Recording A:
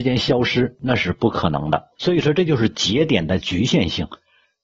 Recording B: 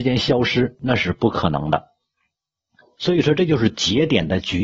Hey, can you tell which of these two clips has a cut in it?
A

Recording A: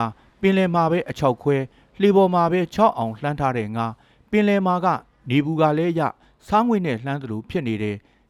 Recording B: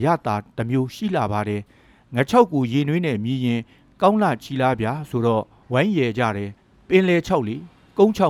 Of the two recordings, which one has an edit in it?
B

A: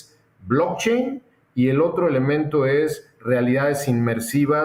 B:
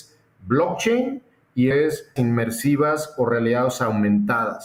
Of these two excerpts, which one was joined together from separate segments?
B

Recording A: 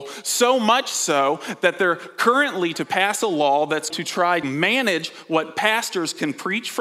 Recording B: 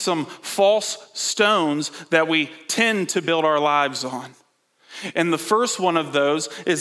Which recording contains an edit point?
A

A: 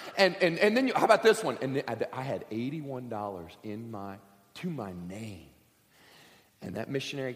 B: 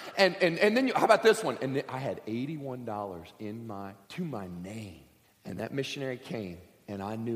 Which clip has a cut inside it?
B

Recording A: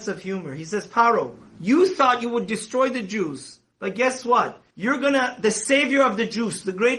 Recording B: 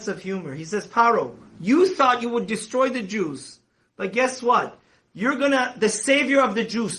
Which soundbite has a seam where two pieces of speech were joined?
A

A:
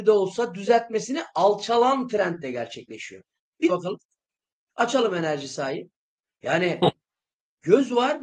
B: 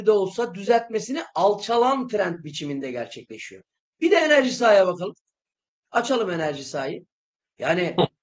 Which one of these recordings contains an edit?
A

